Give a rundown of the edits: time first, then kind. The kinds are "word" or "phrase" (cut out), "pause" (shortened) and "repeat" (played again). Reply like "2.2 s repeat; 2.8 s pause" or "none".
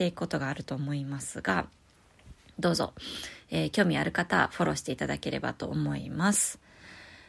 none

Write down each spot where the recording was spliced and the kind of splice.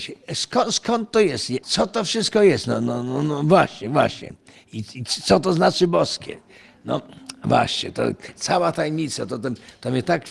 none

